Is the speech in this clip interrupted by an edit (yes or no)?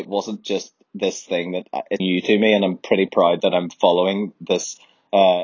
yes